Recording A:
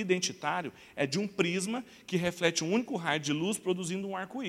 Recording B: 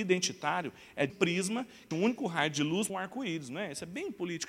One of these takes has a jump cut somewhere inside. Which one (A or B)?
B